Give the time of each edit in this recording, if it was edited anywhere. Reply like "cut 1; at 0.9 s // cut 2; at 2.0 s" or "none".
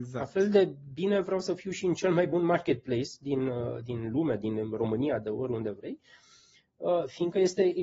none